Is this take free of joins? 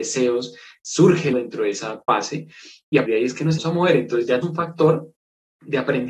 no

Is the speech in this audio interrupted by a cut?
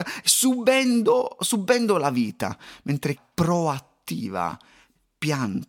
yes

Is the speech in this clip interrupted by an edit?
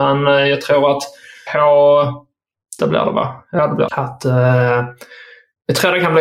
yes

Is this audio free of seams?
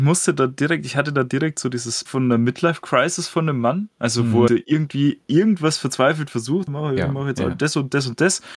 no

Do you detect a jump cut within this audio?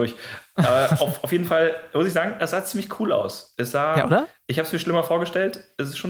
no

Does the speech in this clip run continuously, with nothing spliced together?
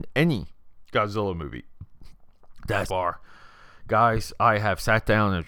no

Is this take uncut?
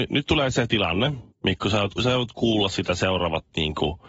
no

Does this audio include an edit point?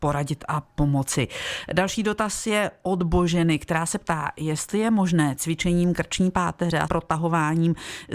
yes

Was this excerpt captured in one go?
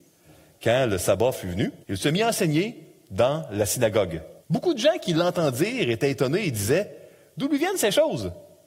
no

